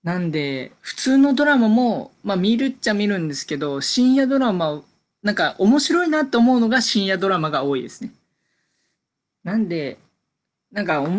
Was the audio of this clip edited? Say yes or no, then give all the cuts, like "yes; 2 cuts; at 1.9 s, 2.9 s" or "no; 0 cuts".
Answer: no; 0 cuts